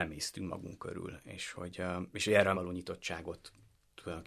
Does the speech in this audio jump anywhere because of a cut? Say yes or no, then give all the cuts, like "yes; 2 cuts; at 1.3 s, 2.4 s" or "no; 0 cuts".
yes; 1 cut; at 2.5 s